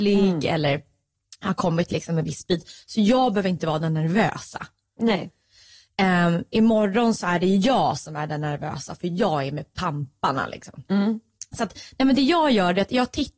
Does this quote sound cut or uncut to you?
uncut